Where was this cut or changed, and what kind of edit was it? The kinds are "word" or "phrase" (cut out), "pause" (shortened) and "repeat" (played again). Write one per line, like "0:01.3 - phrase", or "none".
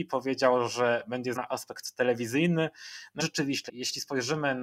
0:01.3 - word
0:03.2 - word
0:03.7 - word